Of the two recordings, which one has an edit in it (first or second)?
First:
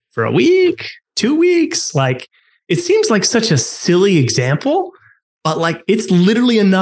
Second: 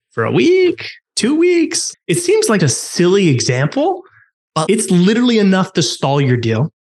second